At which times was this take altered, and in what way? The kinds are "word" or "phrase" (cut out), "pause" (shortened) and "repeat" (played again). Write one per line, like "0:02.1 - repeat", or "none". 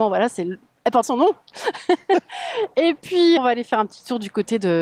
0:01.0 - word
0:03.4 - word